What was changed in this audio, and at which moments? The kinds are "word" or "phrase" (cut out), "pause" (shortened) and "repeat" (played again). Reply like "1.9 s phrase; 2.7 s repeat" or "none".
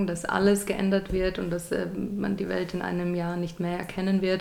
none